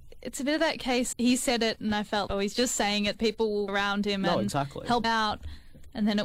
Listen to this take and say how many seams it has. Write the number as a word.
five